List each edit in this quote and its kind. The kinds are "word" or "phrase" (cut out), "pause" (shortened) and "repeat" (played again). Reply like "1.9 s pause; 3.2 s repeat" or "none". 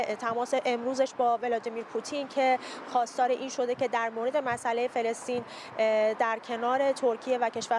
none